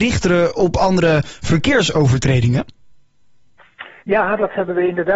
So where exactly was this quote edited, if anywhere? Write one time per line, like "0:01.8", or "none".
0:04.0

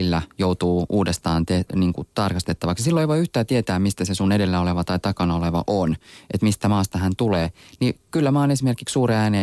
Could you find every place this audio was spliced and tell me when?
none

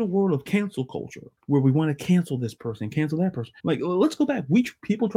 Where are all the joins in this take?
0:01.4
0:03.6

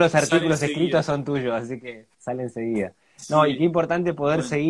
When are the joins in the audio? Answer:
0:02.1

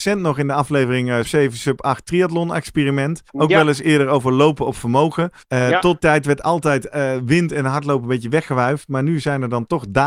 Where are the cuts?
0:01.2
0:03.3
0:05.4
0:06.0

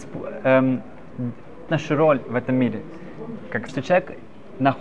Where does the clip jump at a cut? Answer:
0:01.7
0:03.7

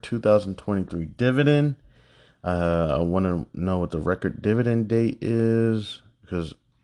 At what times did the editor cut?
none

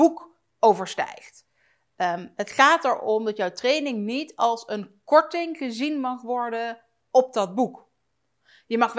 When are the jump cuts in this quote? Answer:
none

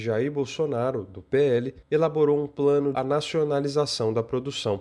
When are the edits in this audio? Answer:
0:01.8
0:02.9

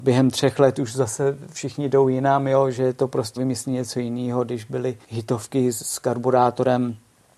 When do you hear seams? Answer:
0:03.4
0:05.0

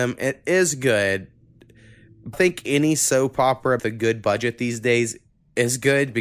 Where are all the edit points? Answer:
0:02.3
0:03.8

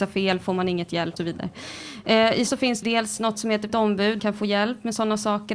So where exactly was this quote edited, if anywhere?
0:01.2
0:02.5
0:02.8
0:03.7
0:04.2

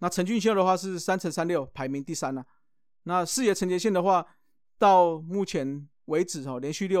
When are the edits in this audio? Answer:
none

